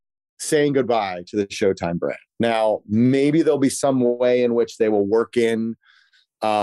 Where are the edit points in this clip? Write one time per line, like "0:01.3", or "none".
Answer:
0:02.3

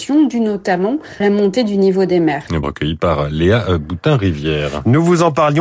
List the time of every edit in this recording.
0:01.2
0:02.6

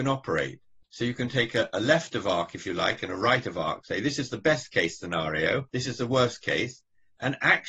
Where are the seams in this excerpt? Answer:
0:05.7

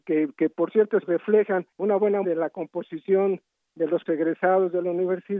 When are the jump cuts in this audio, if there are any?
0:01.0
0:01.7
0:02.2
0:04.1

